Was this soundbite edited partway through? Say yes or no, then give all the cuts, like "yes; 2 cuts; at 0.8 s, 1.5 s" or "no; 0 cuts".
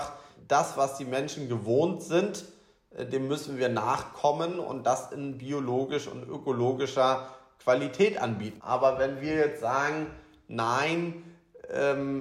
no; 0 cuts